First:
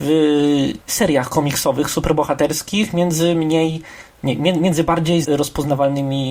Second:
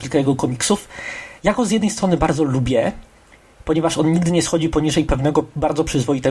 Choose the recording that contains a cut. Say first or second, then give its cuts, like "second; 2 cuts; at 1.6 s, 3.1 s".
first; 1 cut; at 5.2 s